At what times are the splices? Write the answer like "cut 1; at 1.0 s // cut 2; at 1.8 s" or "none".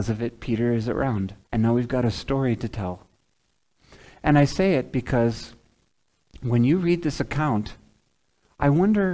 cut 1; at 1.4 s